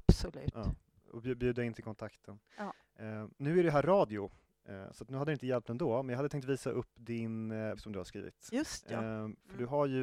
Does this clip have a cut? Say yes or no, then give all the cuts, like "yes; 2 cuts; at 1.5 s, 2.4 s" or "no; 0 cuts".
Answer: yes; 2 cuts; at 3.3 s, 7.8 s